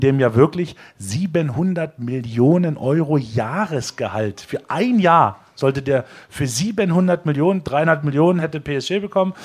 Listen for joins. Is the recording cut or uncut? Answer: uncut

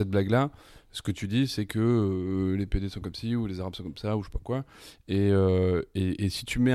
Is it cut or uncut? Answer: uncut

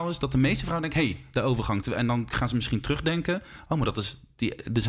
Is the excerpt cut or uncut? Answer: uncut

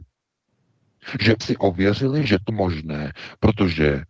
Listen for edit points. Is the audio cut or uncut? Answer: cut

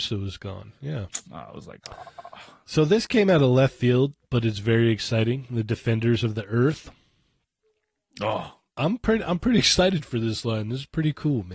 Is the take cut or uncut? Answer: uncut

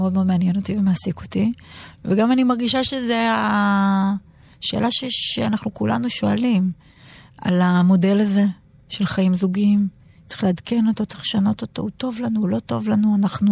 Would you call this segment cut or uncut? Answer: uncut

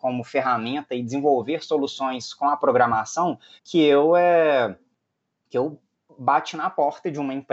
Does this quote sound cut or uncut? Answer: uncut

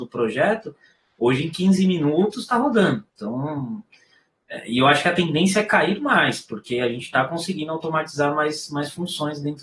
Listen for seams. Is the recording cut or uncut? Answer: cut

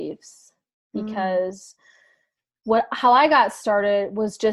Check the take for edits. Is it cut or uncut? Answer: uncut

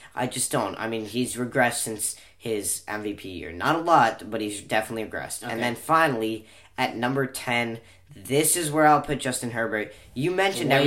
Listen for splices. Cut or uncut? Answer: uncut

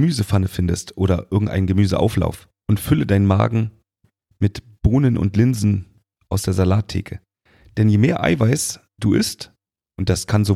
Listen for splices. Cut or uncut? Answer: uncut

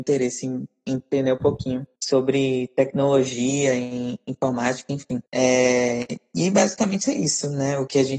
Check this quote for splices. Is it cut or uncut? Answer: cut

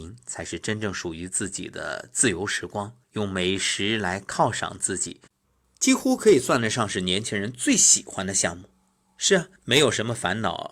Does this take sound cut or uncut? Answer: cut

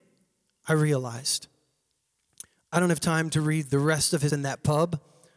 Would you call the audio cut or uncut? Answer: cut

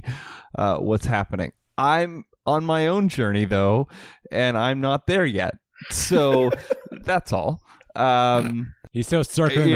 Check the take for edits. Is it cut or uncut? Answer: uncut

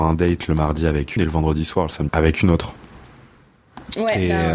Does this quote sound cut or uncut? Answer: cut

